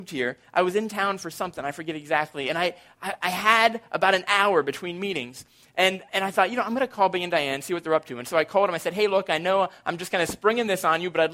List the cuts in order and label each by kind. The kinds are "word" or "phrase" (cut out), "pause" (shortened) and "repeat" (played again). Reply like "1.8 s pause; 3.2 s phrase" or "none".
none